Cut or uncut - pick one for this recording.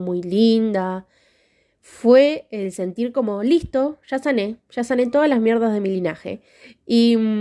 uncut